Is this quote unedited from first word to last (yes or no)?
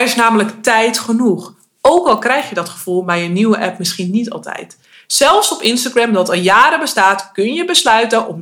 yes